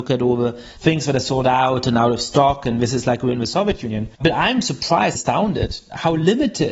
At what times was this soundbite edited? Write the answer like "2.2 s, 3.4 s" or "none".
4.2 s, 5.1 s